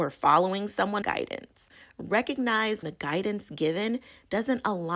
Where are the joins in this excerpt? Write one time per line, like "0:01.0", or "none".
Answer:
0:01.0
0:02.8